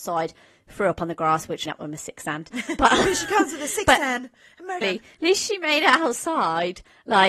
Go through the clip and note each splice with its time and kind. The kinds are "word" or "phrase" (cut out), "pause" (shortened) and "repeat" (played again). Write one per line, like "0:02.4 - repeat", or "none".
0:01.7 - phrase
0:04.8 - word